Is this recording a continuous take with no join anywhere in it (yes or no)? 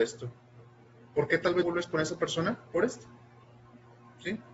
no